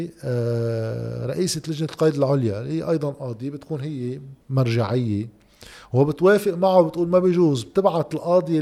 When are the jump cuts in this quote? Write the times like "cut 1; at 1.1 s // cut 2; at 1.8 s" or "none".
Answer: cut 1; at 4.4 s